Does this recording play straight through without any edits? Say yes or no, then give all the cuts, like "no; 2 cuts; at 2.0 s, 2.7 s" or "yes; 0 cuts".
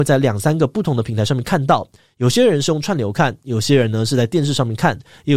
yes; 0 cuts